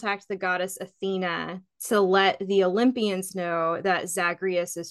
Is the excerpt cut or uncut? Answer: uncut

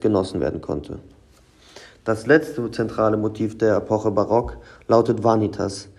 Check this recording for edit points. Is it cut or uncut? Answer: uncut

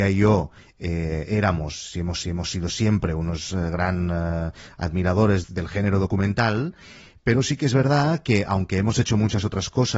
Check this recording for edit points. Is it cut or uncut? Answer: cut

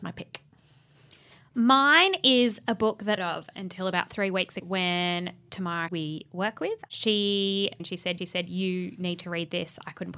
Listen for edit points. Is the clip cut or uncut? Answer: cut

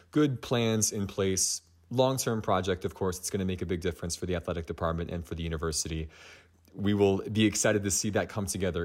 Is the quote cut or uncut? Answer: uncut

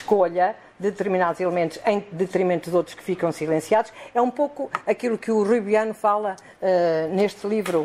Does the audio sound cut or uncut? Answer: uncut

